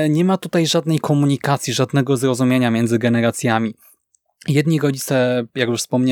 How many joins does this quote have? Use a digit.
0